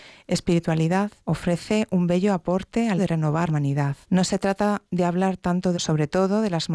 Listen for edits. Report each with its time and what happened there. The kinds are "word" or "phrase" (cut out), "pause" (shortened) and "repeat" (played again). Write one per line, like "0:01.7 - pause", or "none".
0:01.2 - pause
0:03.0 - word
0:03.5 - word
0:04.0 - pause
0:04.9 - pause
0:05.7 - phrase